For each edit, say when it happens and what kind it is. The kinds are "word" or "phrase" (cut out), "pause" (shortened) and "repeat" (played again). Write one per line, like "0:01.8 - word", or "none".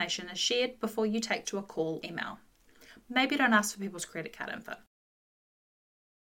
0:01.4 - word
0:02.0 - word